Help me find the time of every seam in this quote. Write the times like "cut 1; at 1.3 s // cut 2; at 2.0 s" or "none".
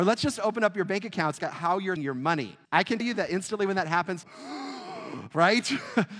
cut 1; at 1.4 s // cut 2; at 2.0 s // cut 3; at 2.6 s // cut 4; at 3.0 s // cut 5; at 4.2 s